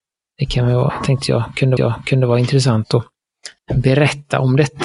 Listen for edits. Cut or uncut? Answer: cut